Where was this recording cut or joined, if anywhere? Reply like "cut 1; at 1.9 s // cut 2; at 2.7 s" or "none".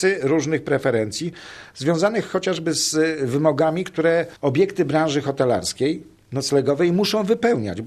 cut 1; at 4.4 s